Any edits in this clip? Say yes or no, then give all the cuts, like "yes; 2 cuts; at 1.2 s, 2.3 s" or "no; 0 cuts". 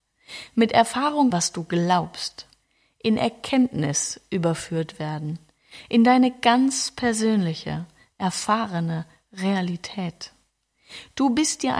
yes; 1 cut; at 1.3 s